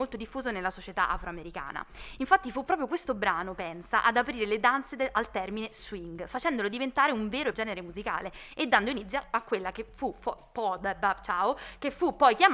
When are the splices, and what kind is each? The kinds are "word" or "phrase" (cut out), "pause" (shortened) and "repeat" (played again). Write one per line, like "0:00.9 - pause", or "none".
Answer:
0:07.5 - word